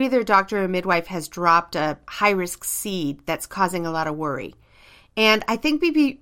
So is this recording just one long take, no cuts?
yes; 0 cuts

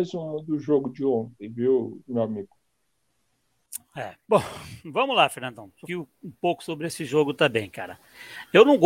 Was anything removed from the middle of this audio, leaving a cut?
yes; 2 cuts; at 4.2 s, 5.9 s

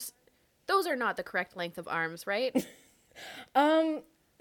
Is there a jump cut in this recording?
no; 0 cuts

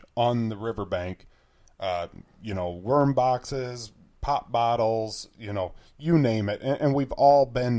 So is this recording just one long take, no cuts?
yes; 0 cuts

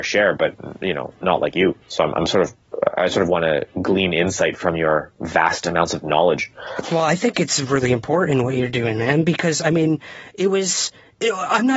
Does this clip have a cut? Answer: yes; 1 cut; at 1.8 s

